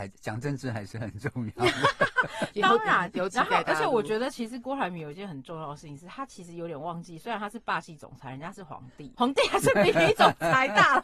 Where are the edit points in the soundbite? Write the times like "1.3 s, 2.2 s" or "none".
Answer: 9.1 s